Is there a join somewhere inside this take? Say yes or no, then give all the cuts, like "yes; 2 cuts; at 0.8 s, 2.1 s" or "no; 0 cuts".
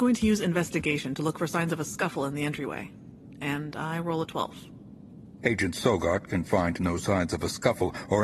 no; 0 cuts